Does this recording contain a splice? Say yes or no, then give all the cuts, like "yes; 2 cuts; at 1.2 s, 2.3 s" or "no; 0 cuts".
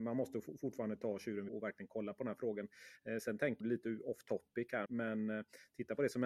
yes; 3 cuts; at 1.5 s, 3.6 s, 4.9 s